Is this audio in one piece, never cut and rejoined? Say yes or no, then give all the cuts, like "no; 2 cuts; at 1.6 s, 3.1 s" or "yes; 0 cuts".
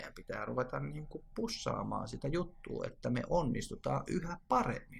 yes; 0 cuts